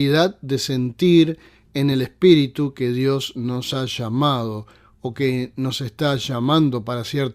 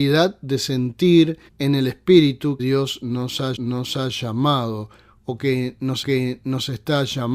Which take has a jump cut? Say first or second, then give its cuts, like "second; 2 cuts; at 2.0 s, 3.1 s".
second; 4 cuts; at 1.5 s, 2.6 s, 3.6 s, 6.0 s